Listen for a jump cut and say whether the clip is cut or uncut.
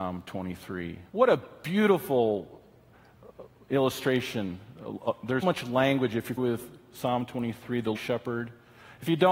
cut